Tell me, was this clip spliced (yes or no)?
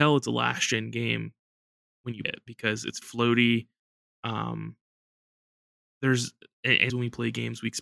yes